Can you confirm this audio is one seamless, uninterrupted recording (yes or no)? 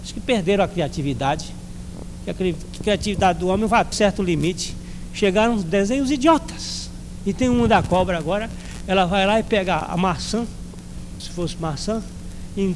no